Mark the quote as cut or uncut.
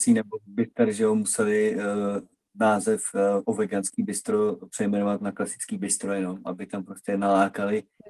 uncut